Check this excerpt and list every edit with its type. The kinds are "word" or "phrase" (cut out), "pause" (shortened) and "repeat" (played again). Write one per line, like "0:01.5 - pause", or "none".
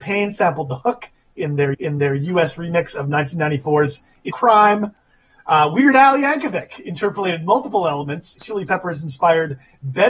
0:01.7 - repeat
0:04.3 - phrase
0:08.4 - phrase

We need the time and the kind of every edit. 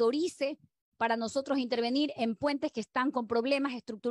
none

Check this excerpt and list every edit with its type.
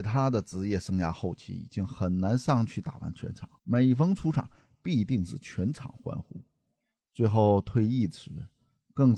0:03.6 - pause

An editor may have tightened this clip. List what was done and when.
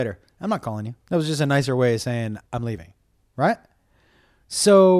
0:01.0 - pause
0:02.5 - pause

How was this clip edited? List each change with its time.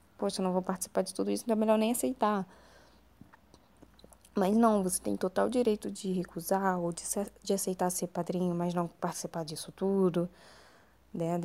none

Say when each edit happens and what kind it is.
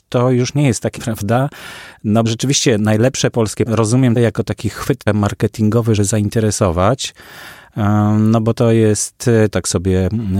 0:01.0 - word
0:02.2 - word
0:03.7 - word
0:04.2 - word
0:05.1 - word
0:06.0 - word
0:09.5 - word

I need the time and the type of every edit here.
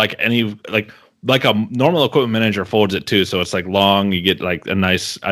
none

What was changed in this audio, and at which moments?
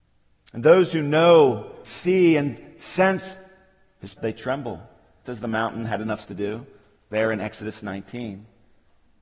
0:01.8 - word
0:04.2 - word
0:05.3 - word
0:06.2 - word

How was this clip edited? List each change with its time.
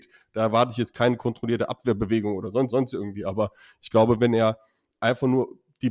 0:02.7 - repeat

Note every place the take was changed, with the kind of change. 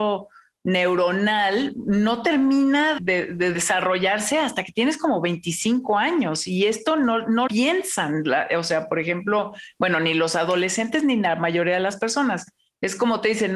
0:03.0 - word
0:03.5 - word
0:07.5 - word

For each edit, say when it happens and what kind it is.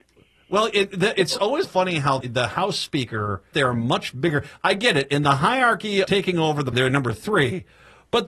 0:01.6 - word
0:02.2 - word
0:03.5 - phrase
0:06.0 - word
0:06.7 - word

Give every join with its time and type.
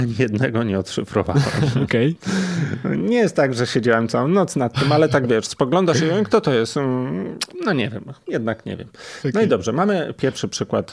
none

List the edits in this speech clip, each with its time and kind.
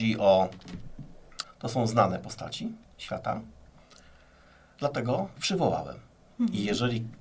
0:01.4 - word
0:02.9 - word
0:05.4 - word

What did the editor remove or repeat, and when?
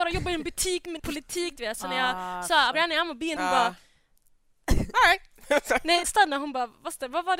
0:01.0 - word
0:02.7 - phrase
0:03.4 - word
0:06.0 - phrase

